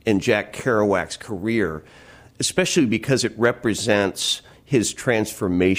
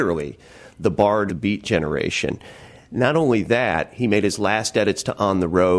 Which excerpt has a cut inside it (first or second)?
second